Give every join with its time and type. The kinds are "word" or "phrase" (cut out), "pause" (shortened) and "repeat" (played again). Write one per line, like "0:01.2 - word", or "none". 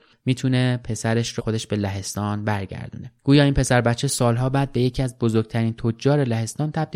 0:01.4 - word
0:03.2 - pause